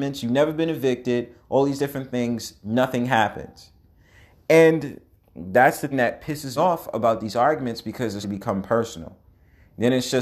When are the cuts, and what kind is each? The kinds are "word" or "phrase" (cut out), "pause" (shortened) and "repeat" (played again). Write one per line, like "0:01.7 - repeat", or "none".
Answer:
0:05.9 - word
0:06.6 - word
0:08.2 - word